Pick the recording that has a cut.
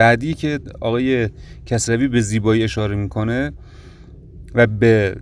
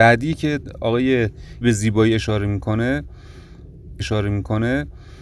second; 2 cuts; at 1.6 s, 4.0 s

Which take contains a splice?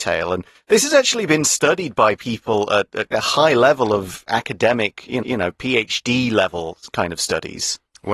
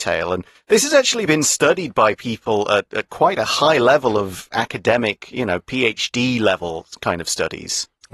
first; 2 cuts; at 3.1 s, 5.2 s

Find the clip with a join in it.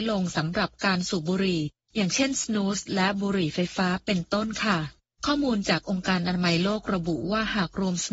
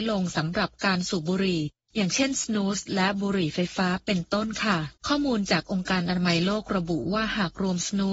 second; 1 cut; at 5.0 s

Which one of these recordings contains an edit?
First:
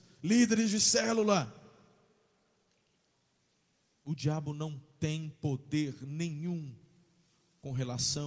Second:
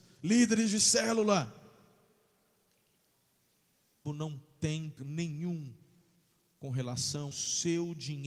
second; 3 cuts; at 4.1 s, 5.0 s, 7.3 s

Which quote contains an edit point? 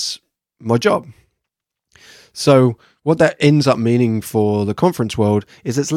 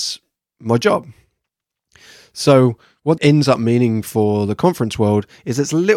second; 1 cut; at 3.2 s

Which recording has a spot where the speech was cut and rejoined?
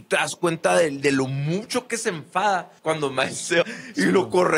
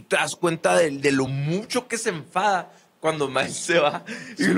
first; 2 cuts; at 2.8 s, 3.6 s

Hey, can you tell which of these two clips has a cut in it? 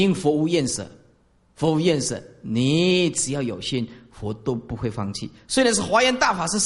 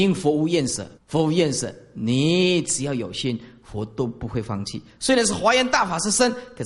second; 1 cut; at 1.0 s

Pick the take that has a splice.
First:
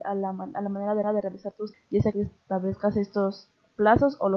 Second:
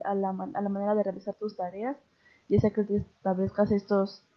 first; 3 cuts; at 1.0 s, 1.7 s, 2.1 s

